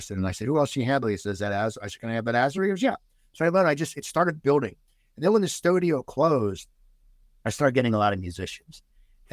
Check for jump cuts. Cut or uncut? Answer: uncut